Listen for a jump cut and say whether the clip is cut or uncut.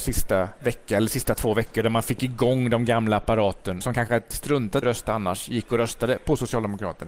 cut